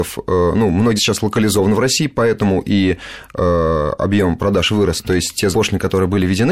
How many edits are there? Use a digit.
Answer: 2